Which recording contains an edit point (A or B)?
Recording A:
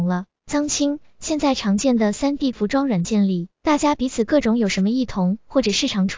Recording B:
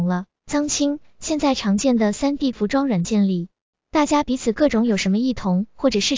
A